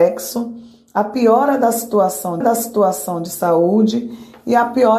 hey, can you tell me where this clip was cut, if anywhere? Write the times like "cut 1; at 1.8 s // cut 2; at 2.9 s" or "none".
cut 1; at 2.4 s